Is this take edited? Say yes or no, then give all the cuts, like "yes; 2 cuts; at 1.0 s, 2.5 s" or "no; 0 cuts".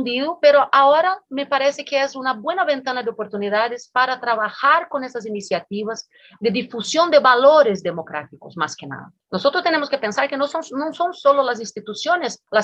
no; 0 cuts